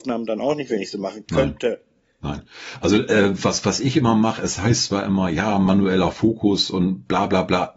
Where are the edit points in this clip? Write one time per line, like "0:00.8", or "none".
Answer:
none